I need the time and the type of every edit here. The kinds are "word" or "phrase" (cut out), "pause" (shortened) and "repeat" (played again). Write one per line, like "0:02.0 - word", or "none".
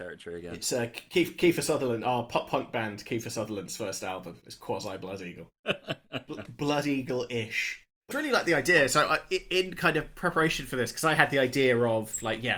0:08.1 - phrase